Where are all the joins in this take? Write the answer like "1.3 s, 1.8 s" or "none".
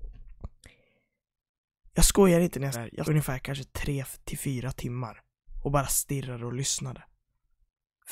2.7 s, 3.0 s